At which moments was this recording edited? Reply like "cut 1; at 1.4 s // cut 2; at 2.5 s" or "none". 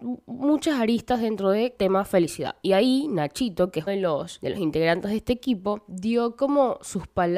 cut 1; at 3.9 s